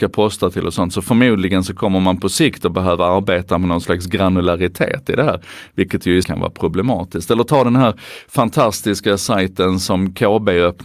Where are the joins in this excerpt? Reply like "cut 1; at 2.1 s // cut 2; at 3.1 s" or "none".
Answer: cut 1; at 6.2 s